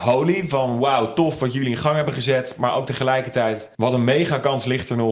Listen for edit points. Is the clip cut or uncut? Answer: cut